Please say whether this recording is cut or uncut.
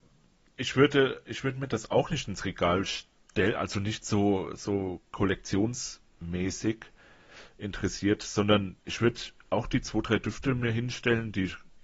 cut